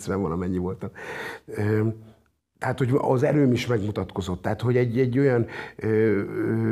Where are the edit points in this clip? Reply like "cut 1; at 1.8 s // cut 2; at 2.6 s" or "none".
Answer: cut 1; at 2.4 s